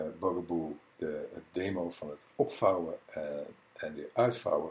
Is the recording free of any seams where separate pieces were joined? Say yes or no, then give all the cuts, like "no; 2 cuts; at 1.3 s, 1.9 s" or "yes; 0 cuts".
yes; 0 cuts